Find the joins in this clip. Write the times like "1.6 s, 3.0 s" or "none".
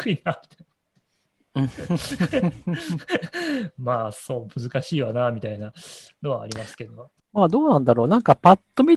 7.2 s